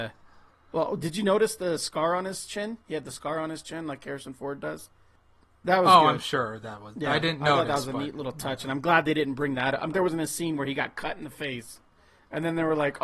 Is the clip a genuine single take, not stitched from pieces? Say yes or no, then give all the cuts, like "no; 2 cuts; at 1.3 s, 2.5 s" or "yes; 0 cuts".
no; 2 cuts; at 2.8 s, 9.9 s